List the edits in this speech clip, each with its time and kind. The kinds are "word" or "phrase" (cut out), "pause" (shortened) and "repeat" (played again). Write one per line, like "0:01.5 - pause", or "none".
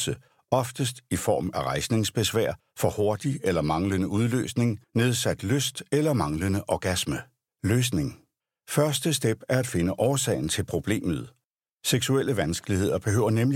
none